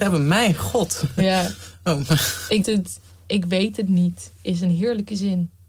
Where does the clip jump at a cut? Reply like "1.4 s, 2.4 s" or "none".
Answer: 2.6 s